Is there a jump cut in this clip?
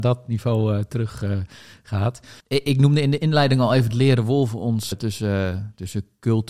yes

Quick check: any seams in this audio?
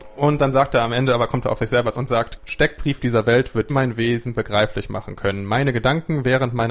yes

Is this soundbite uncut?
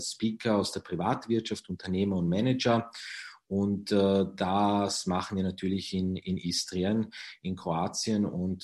yes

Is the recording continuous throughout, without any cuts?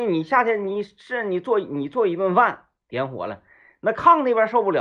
yes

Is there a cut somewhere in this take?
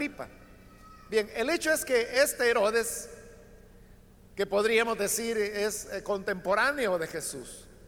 no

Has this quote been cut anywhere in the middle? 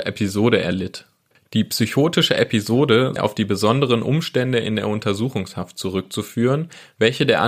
yes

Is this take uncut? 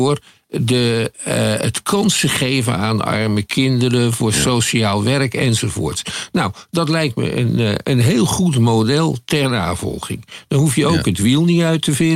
yes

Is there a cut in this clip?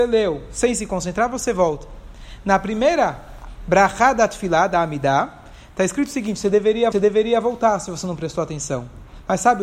yes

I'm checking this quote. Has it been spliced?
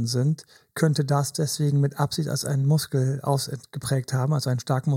no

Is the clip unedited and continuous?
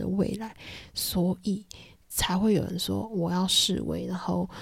yes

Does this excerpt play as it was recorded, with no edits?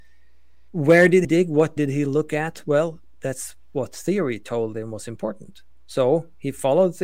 no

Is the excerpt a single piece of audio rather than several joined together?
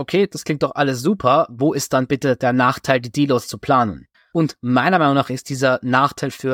no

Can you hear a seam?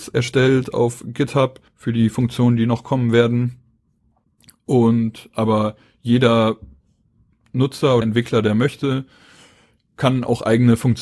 yes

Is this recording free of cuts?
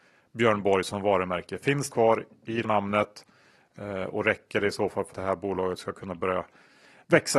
no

